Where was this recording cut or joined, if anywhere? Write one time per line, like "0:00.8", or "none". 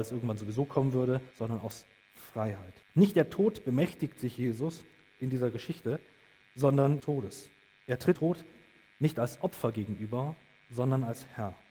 0:01.3
0:02.8
0:07.0
0:08.2